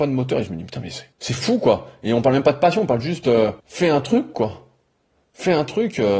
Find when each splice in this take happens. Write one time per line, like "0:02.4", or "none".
0:01.1
0:03.6